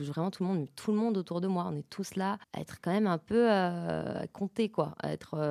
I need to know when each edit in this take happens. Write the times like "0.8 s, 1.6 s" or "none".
2.4 s